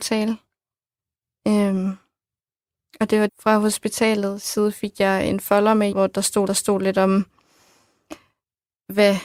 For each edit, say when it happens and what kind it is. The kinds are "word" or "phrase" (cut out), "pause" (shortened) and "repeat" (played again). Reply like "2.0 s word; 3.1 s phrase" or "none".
3.3 s word; 5.9 s phrase; 6.5 s repeat